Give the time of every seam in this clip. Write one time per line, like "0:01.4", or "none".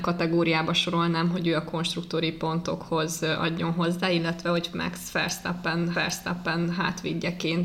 0:05.9